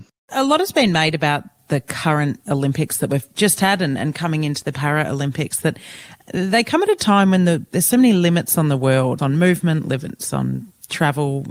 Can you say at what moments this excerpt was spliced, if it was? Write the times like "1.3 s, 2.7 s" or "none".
9.2 s